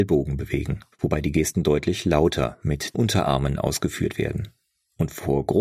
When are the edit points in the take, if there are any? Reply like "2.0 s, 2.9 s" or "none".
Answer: 0.9 s, 2.9 s